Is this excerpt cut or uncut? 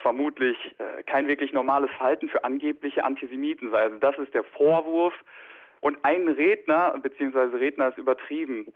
uncut